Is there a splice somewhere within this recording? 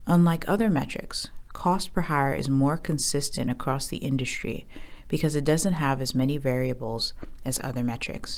no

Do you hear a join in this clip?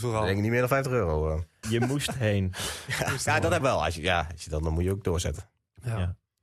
yes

